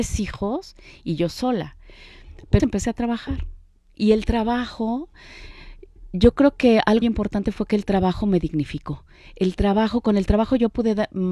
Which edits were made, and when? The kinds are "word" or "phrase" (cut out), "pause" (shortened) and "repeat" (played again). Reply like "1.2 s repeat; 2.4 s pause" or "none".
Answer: 2.6 s word; 7.0 s word